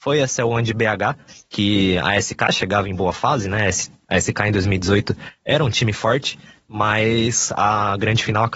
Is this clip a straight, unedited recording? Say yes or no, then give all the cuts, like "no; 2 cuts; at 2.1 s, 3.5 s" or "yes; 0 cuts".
yes; 0 cuts